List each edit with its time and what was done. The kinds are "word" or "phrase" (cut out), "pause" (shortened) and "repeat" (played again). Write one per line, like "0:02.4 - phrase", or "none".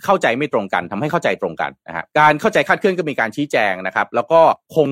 0:02.1 - pause